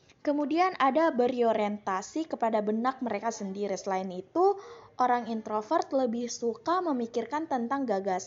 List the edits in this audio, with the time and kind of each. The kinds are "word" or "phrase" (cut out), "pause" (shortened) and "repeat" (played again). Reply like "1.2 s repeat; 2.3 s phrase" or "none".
none